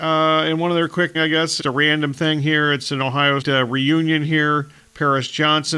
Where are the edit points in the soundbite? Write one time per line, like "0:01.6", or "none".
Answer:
0:01.1
0:01.6
0:03.4